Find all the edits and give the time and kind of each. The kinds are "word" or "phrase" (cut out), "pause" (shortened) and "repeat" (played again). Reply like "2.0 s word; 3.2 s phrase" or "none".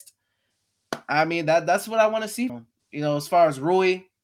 2.5 s word